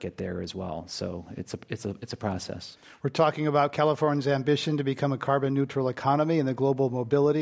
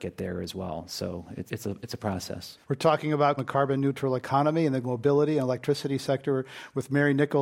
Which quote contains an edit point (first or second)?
second